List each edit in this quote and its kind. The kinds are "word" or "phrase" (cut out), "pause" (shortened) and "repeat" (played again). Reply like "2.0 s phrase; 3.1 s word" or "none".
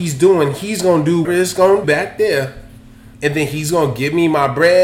1.2 s word; 1.8 s word; 3.1 s pause

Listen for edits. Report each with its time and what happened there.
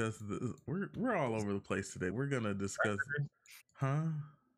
2.1 s word; 3.6 s word

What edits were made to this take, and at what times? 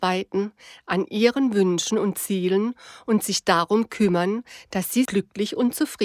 5.1 s word

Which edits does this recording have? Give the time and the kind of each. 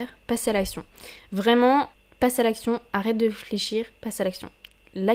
none

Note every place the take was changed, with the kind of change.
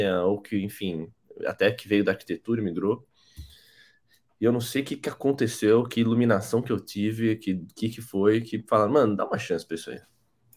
none

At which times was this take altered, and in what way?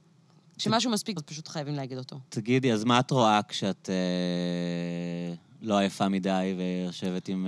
1.2 s word; 2.3 s pause

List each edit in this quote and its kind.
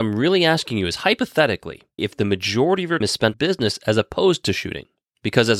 2.0 s phrase; 3.0 s word; 3.3 s word

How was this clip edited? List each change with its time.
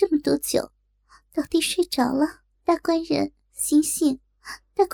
2.5 s pause

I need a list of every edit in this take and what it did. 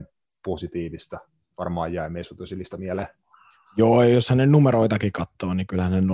none

